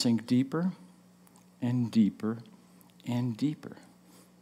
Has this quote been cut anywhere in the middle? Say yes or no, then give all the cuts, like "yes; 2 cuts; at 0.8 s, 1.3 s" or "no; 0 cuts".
no; 0 cuts